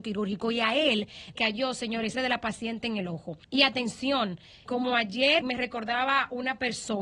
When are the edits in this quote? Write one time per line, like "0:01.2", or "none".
0:01.4
0:02.1
0:03.4
0:04.7
0:05.4